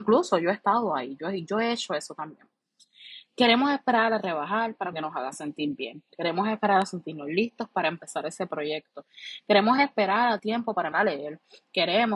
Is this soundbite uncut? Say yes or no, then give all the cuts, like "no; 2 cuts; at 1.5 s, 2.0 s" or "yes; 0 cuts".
no; 3 cuts; at 4.9 s, 10.4 s, 10.9 s